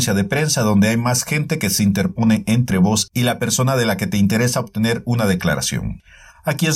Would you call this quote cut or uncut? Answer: uncut